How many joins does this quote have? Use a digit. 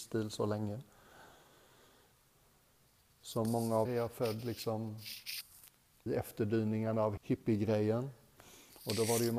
3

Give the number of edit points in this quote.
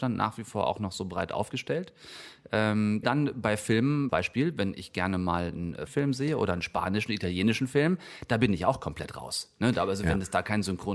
3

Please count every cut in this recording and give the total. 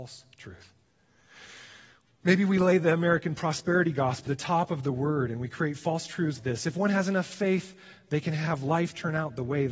2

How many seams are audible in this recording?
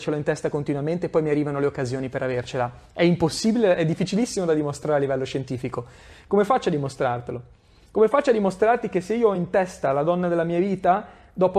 0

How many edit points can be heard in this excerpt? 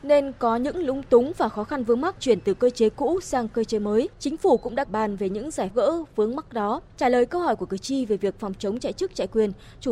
5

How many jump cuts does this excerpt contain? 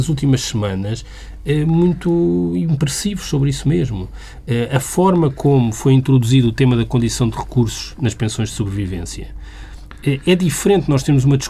0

